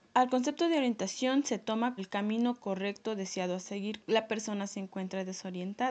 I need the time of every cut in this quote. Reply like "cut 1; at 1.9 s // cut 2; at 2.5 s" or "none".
cut 1; at 2.0 s // cut 2; at 4.0 s

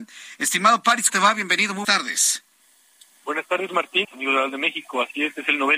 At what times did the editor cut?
cut 1; at 1.1 s // cut 2; at 1.8 s // cut 3; at 3.7 s // cut 4; at 4.0 s

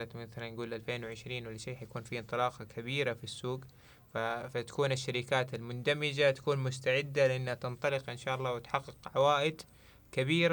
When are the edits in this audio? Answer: none

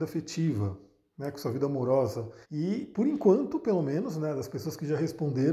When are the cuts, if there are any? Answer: cut 1; at 2.4 s

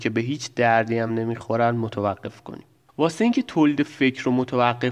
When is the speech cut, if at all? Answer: none

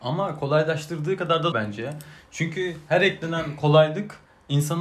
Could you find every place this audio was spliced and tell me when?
cut 1; at 1.5 s

